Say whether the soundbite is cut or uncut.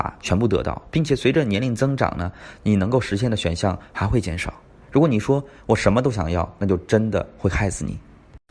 uncut